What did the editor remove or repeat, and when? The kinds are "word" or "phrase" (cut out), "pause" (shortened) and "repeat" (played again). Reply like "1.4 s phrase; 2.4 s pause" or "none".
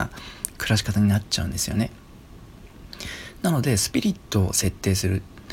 none